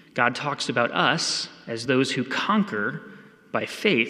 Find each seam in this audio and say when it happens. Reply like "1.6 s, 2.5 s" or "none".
none

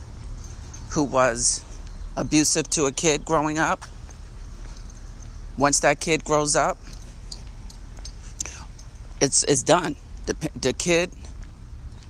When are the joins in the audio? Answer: none

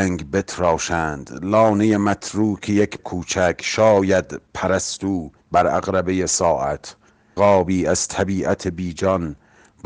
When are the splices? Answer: 3.0 s, 5.4 s, 7.4 s

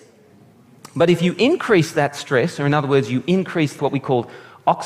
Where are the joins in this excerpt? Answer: 3.8 s

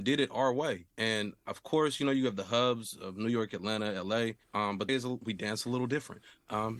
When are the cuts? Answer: 0.9 s, 4.4 s, 4.9 s

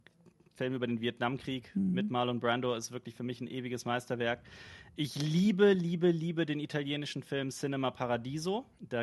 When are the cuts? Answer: none

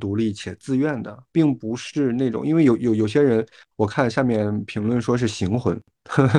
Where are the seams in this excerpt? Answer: none

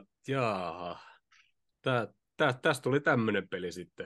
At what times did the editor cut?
none

